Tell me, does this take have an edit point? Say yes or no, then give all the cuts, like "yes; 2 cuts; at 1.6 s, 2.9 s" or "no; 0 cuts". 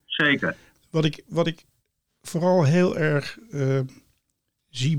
no; 0 cuts